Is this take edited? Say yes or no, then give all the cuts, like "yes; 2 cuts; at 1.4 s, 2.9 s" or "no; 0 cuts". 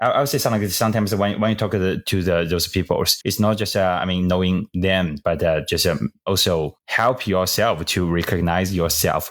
no; 0 cuts